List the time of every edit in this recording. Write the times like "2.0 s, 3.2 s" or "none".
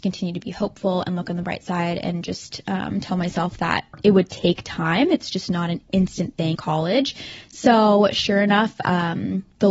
6.5 s